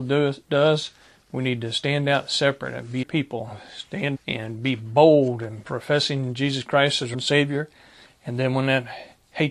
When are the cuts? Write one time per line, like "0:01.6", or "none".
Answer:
0:03.0
0:04.1
0:07.1